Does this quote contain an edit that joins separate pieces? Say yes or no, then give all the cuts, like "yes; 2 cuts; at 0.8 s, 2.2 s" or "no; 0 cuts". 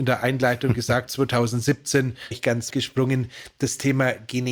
yes; 3 cuts; at 1.1 s, 2.3 s, 2.7 s